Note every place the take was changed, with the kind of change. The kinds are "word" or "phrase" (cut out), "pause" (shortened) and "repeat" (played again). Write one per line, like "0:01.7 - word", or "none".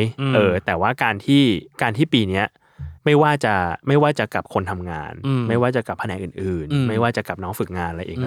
0:01.7 - pause
0:03.0 - pause